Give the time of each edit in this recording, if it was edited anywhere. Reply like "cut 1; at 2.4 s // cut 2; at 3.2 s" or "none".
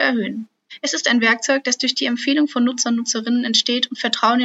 none